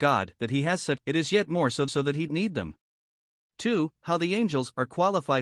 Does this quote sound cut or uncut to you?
cut